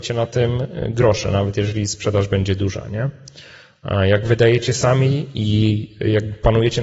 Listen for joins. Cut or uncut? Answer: uncut